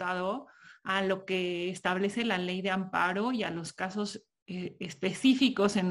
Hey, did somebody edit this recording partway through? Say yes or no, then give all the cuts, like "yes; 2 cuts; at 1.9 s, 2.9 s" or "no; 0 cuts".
no; 0 cuts